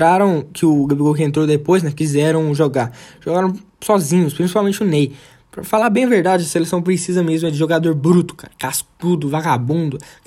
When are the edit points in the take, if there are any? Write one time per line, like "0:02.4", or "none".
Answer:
none